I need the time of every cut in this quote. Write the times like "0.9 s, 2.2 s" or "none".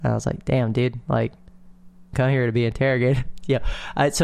2.1 s